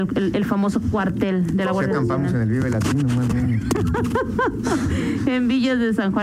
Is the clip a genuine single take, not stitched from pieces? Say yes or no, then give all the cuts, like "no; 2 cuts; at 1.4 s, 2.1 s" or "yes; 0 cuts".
yes; 0 cuts